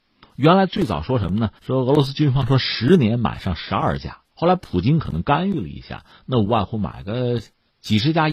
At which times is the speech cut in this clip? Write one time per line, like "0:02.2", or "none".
0:01.6
0:04.2